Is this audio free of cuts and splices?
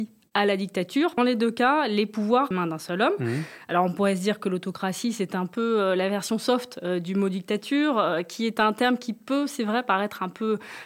no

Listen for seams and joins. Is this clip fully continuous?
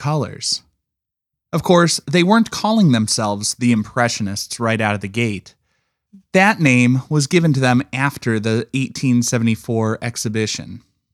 yes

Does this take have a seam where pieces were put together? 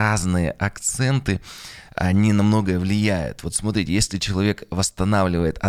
no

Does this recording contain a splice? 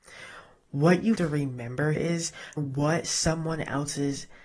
yes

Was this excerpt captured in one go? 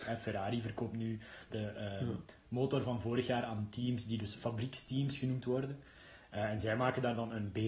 no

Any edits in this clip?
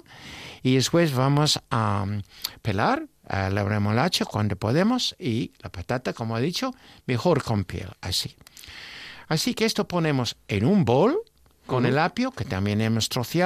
no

